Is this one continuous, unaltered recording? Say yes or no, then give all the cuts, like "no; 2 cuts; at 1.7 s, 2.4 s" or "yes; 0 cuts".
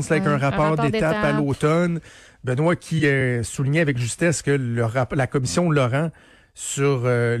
yes; 0 cuts